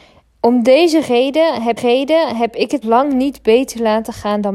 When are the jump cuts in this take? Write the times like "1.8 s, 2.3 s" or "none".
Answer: 1.8 s, 2.8 s